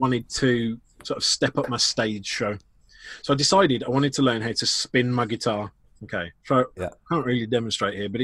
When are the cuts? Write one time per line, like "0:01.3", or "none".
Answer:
0:06.4